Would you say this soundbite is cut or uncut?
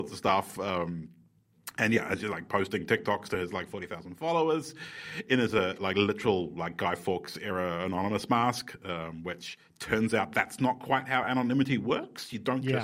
uncut